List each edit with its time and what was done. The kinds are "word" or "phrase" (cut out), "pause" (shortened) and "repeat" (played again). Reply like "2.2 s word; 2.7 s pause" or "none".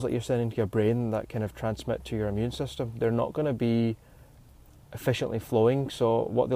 none